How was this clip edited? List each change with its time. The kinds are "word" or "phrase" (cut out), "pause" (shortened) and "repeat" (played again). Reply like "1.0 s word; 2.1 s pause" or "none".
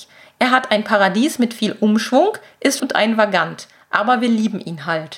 2.8 s word